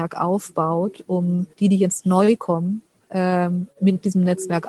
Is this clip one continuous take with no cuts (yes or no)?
no